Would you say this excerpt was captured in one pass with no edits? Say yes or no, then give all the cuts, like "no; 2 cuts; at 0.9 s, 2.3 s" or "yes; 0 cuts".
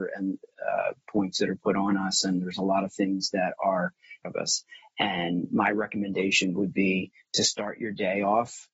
no; 1 cut; at 4.2 s